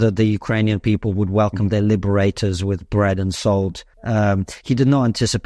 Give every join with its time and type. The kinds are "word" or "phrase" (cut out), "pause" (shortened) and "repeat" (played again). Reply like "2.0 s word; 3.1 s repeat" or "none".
3.9 s pause